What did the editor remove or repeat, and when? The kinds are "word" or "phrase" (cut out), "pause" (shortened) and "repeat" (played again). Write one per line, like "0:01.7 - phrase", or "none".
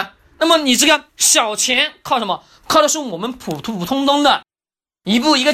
0:01.1 - pause